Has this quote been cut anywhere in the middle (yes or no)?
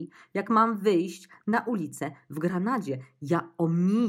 no